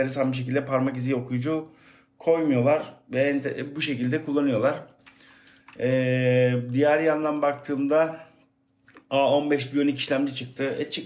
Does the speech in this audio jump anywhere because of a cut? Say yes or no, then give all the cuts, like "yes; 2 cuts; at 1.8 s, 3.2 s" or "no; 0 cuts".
no; 0 cuts